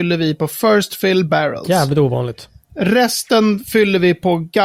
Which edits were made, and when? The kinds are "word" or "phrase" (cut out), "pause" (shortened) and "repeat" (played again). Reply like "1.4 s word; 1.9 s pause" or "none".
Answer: 1.3 s word